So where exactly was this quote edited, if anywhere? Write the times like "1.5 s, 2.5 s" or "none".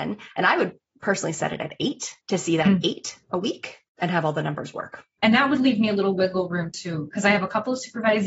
2.2 s, 3.9 s, 5.2 s